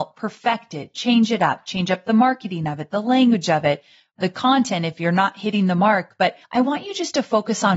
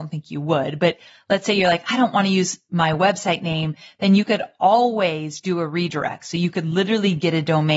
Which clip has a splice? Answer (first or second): first